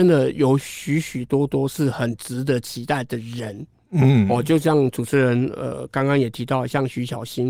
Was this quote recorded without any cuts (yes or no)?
yes